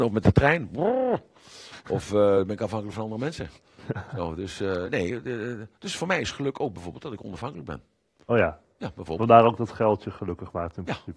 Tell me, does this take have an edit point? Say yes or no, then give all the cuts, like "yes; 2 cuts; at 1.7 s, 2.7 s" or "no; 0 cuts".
no; 0 cuts